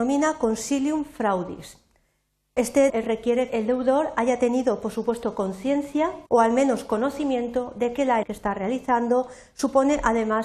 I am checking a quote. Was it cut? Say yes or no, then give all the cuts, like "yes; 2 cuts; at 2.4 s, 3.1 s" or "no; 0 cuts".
yes; 4 cuts; at 2.9 s, 3.5 s, 6.3 s, 8.2 s